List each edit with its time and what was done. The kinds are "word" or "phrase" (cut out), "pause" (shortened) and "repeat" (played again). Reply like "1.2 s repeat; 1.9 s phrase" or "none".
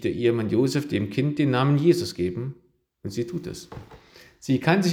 none